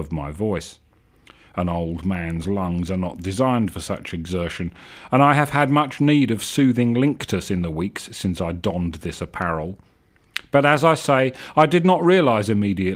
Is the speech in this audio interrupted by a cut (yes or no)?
no